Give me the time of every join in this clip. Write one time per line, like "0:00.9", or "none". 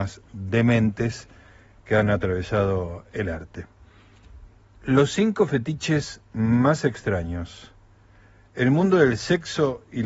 none